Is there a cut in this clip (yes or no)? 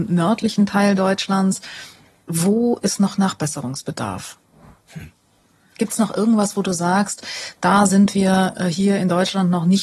no